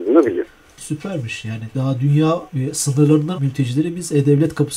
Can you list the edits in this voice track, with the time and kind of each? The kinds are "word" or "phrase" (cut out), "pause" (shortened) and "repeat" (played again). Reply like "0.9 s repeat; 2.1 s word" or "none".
2.5 s pause; 3.3 s word